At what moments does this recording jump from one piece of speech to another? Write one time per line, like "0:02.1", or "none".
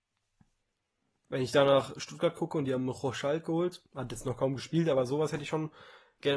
none

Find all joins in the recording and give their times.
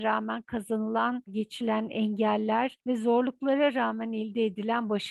0:01.3

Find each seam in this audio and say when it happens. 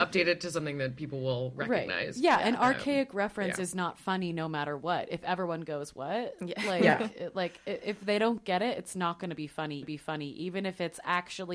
0:09.8

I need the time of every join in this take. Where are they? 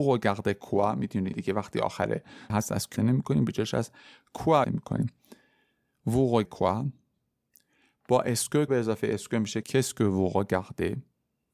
0:01.3
0:02.5
0:03.0
0:04.6
0:06.4
0:08.7
0:09.6

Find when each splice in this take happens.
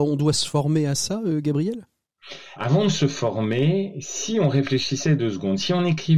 0:02.6

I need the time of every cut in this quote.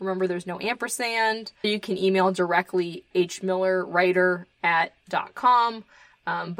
0:01.6
0:03.1
0:05.0

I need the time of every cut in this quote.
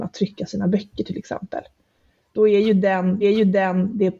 0:03.2

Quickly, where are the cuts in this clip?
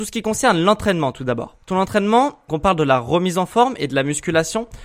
0:01.6
0:02.5

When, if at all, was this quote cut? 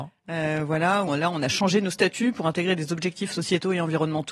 0:01.1

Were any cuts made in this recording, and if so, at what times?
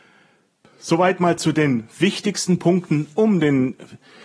none

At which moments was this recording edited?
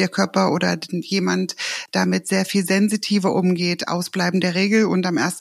none

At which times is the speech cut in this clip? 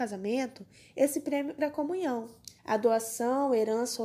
0:01.6
0:02.6

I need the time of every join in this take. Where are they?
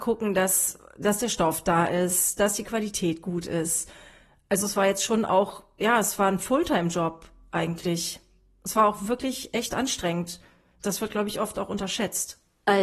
none

